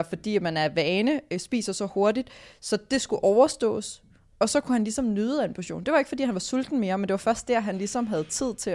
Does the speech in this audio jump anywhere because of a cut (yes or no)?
no